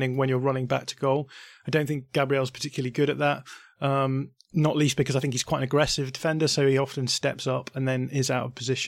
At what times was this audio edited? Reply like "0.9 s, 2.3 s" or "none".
none

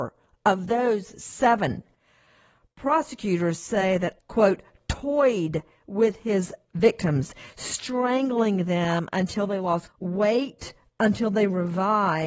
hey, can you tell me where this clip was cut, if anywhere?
4.2 s, 9.9 s

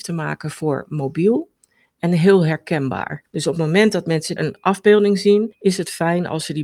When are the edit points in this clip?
4.4 s

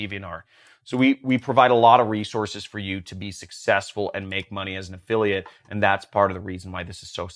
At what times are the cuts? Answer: none

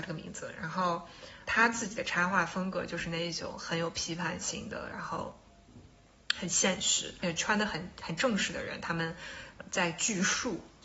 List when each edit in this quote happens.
1.5 s

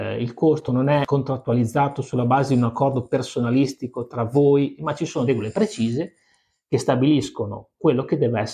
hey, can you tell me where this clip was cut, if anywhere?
4.8 s, 5.3 s

